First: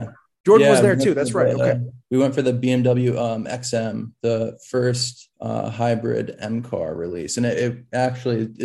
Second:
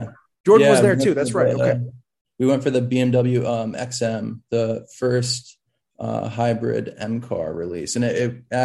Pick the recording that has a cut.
first; 2 cuts; at 2.0 s, 5.3 s

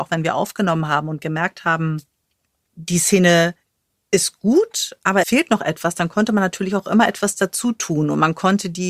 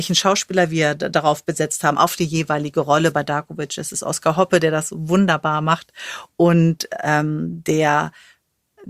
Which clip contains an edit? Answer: first; 1 cut; at 5.2 s

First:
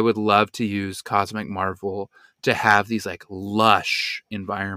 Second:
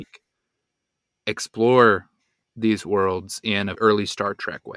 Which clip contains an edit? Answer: second; 1 cut; at 3.8 s

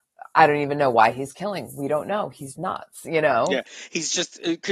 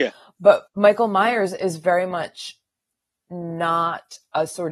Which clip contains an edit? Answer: first; 1 cut; at 2.5 s

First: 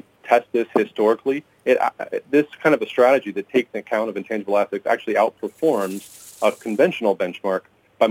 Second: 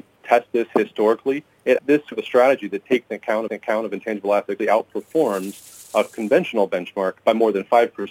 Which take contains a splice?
second; 5 cuts; at 1.8 s, 2.1 s, 3.5 s, 4.6 s, 7.2 s

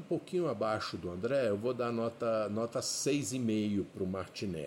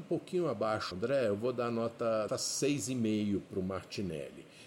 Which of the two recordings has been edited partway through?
second; 2 cuts; at 0.9 s, 2.3 s

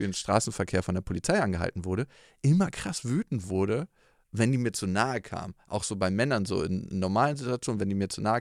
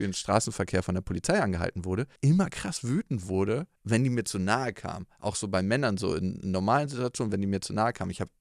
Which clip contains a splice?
second; 2 cuts; at 2.2 s, 3.8 s

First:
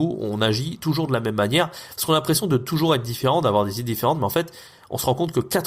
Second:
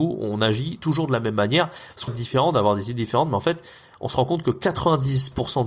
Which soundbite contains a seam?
second; 1 cut; at 2.1 s

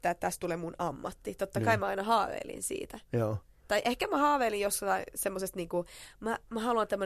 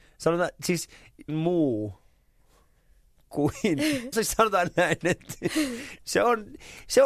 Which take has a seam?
second; 2 cuts; at 1.3 s, 4.1 s

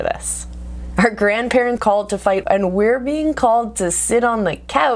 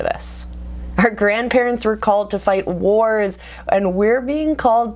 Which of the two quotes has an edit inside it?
first; 2 cuts; at 1.8 s, 2.4 s

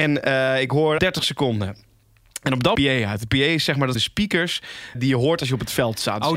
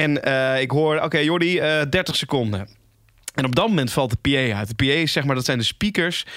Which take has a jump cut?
first; 4 cuts; at 1.0 s, 2.8 s, 4.0 s, 4.9 s

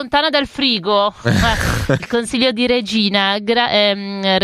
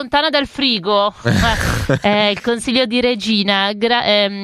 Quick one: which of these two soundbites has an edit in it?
first; 1 cut; at 2.0 s

